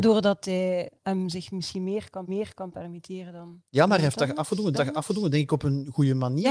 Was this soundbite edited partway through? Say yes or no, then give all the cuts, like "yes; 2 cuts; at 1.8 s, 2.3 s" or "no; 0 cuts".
yes; 4 cuts; at 1.0 s, 2.3 s, 3.7 s, 4.7 s